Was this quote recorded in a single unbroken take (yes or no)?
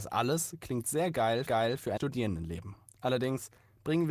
no